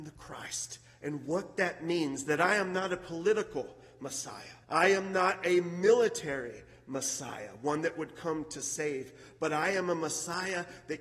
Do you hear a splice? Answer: yes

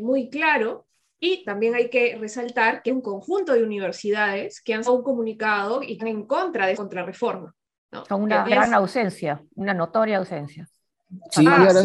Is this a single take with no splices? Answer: no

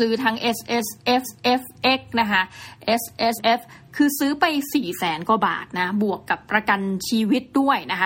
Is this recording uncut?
no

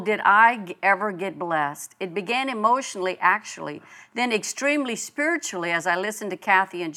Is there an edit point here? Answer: no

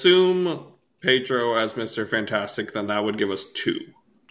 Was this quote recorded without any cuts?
yes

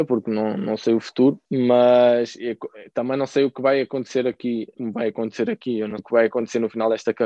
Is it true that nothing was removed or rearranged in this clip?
no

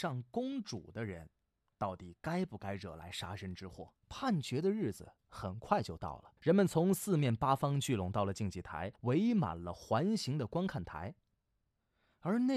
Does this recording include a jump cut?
yes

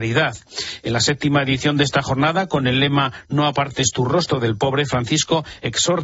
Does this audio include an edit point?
no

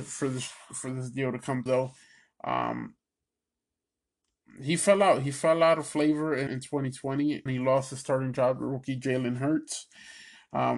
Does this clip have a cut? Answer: yes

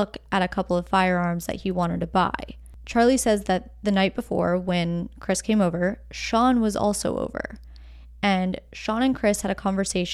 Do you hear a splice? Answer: no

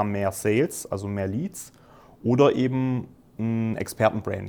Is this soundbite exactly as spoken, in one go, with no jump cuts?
yes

